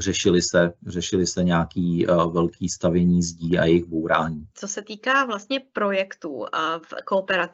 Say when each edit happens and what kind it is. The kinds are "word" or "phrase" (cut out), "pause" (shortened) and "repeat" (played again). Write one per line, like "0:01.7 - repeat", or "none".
0:04.5 - pause